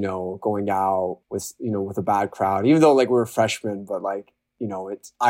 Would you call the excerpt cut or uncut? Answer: uncut